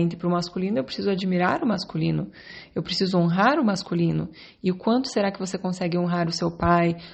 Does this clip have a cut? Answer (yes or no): no